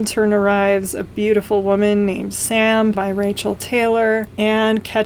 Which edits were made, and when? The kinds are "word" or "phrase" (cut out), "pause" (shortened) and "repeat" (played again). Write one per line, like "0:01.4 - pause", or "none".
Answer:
0:02.9 - word